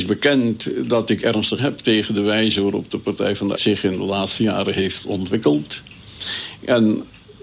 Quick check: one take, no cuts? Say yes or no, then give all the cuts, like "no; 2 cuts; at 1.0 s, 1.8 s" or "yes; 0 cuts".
no; 2 cuts; at 1.6 s, 3.5 s